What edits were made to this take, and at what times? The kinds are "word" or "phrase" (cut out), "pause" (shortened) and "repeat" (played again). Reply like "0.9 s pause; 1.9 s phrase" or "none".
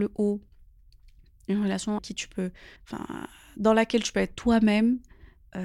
2.0 s word; 2.8 s pause